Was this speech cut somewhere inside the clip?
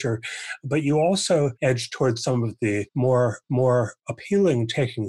yes; 1 cut; at 3.4 s

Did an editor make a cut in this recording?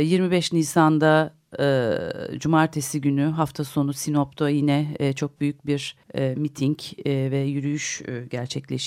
yes; 1 cut; at 6.0 s

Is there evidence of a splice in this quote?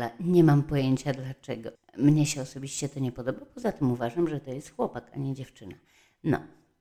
yes; 1 cut; at 1.7 s

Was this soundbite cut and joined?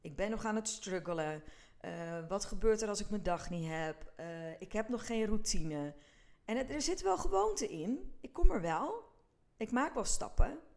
no; 0 cuts

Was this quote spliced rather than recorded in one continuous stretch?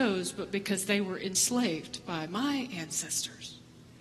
no; 0 cuts

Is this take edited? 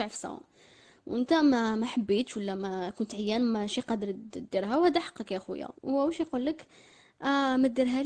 yes; 1 cut; at 5.8 s

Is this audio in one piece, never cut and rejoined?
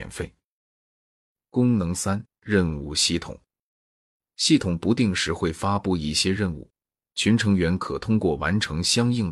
yes; 0 cuts

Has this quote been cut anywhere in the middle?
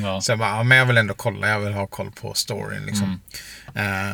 no; 0 cuts

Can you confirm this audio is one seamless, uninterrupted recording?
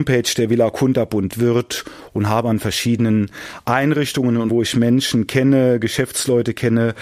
no; 2 cuts; at 1.3 s, 4.5 s

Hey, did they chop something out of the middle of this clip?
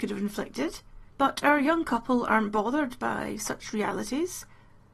yes; 1 cut; at 1.1 s

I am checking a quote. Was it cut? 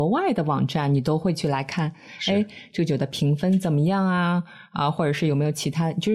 no; 0 cuts

